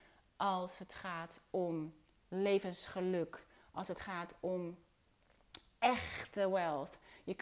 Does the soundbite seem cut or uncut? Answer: uncut